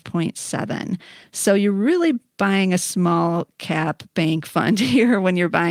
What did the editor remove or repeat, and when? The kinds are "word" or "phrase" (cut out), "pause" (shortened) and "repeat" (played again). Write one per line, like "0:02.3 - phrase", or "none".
none